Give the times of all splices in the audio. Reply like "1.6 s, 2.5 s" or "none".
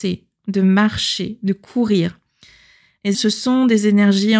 3.1 s